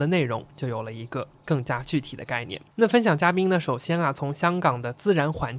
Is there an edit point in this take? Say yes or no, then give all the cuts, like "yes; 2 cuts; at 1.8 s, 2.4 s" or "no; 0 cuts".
yes; 1 cut; at 2.7 s